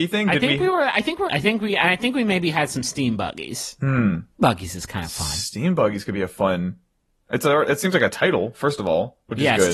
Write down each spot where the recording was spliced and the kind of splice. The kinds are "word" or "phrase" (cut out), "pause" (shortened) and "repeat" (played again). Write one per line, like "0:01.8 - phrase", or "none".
0:01.3 - phrase
0:04.4 - word